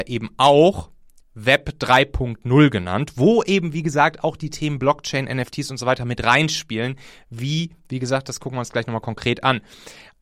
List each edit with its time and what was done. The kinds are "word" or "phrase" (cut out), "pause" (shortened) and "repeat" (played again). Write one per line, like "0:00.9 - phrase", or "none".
none